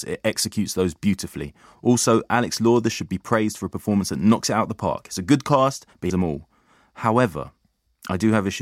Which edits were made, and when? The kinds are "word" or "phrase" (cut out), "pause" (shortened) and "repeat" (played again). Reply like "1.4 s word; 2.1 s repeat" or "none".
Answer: 6.1 s word